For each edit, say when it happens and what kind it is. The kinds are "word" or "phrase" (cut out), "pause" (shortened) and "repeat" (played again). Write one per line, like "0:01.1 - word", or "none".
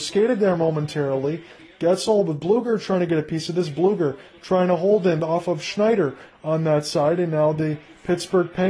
none